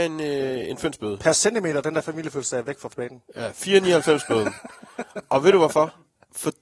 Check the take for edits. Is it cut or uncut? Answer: uncut